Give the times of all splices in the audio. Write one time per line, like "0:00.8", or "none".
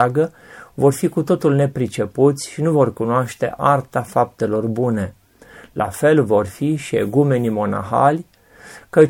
none